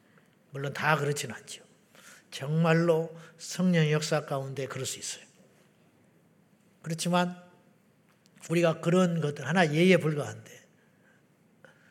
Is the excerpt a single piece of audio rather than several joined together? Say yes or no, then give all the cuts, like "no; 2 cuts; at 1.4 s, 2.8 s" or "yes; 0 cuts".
yes; 0 cuts